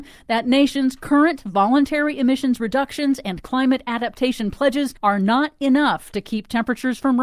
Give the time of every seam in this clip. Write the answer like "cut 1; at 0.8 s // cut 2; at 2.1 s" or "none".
cut 1; at 5.0 s